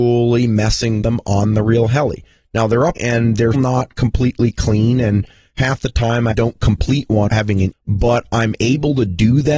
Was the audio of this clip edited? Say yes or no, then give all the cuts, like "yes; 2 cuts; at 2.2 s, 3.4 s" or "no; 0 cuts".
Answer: yes; 6 cuts; at 1.0 s, 3.0 s, 3.5 s, 6.3 s, 7.3 s, 7.7 s